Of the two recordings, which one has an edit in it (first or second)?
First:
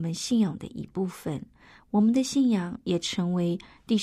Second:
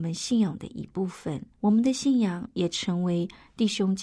second